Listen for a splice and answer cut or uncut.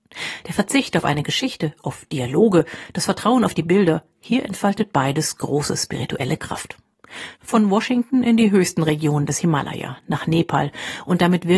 cut